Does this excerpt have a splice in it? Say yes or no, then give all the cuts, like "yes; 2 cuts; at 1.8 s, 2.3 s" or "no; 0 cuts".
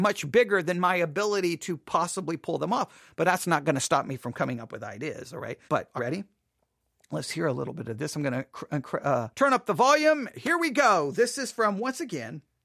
yes; 3 cuts; at 5.7 s, 6.0 s, 9.3 s